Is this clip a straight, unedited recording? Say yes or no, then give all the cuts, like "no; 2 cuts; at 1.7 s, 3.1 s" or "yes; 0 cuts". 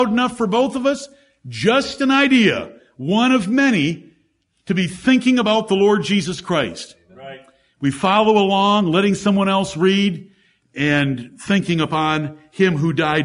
yes; 0 cuts